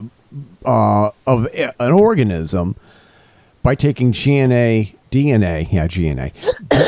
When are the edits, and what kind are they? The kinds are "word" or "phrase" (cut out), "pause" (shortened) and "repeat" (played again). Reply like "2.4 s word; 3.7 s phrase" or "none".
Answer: 1.7 s word